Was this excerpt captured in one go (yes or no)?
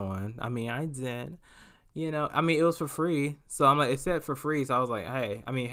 yes